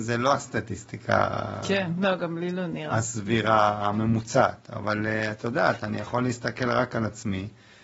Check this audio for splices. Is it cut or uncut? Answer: uncut